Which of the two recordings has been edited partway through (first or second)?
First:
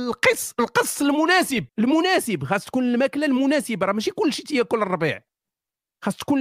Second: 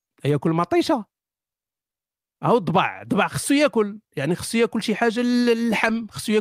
first